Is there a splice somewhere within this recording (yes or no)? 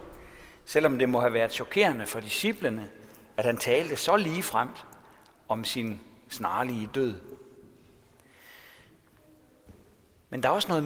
no